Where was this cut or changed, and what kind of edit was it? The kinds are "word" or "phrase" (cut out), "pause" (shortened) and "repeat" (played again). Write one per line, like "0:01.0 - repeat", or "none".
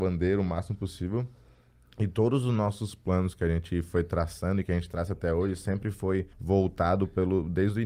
0:06.3 - pause